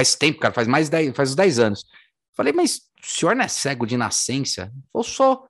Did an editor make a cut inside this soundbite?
no; 0 cuts

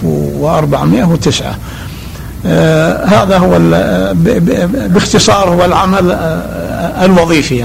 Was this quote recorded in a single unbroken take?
yes; 0 cuts

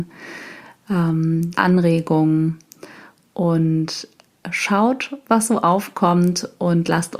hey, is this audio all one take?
no; 1 cut; at 1.5 s

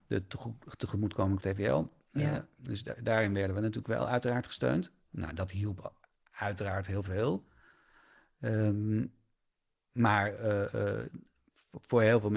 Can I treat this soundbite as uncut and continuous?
no; 2 cuts; at 1.4 s, 3.0 s

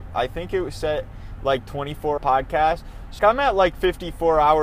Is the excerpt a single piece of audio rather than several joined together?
no; 2 cuts; at 2.2 s, 3.2 s

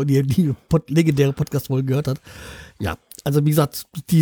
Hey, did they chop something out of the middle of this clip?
no; 0 cuts

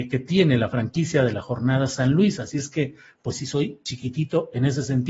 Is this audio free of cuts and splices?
yes; 0 cuts

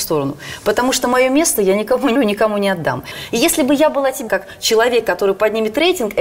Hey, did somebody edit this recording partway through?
yes; 2 cuts; at 2.2 s, 4.3 s

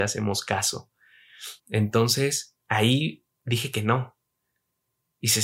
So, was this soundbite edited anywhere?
yes; 1 cut; at 1.6 s

